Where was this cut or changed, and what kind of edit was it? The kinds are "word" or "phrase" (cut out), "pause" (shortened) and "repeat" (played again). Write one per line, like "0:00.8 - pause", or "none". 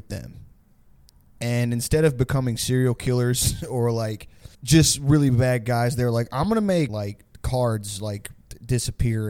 0:04.5 - pause
0:06.9 - word

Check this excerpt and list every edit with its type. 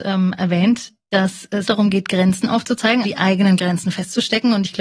0:01.7 - word
0:03.0 - word

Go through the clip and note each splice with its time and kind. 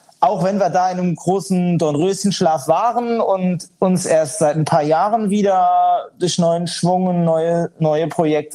none

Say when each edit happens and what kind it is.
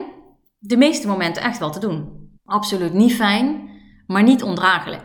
0:02.4 - pause

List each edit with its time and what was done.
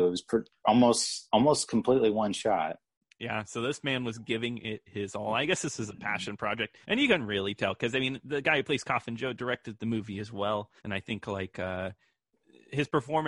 0:06.8 - pause
0:10.8 - pause

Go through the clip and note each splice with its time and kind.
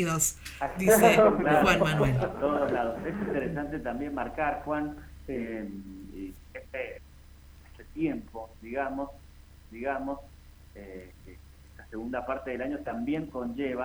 0:06.5 - phrase
0:09.6 - repeat

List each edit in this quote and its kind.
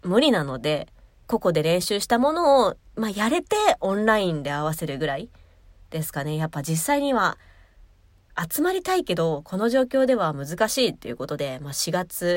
none

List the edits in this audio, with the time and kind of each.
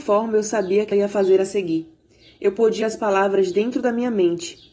0:00.9 - word
0:02.8 - word

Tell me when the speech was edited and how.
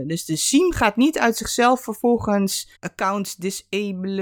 0:02.7 - pause

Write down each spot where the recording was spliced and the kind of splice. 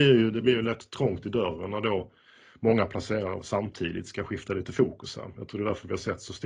none

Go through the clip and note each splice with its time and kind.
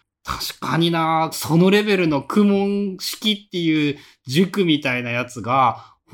0:01.3 - phrase

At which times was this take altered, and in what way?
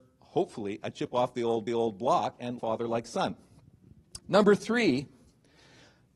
0:01.7 - repeat
0:02.6 - word

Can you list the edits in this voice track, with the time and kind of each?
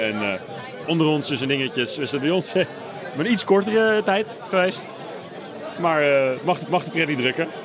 0:06.7 - repeat

